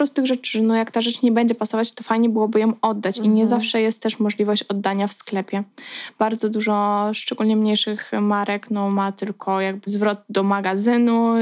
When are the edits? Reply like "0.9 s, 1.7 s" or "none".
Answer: 9.8 s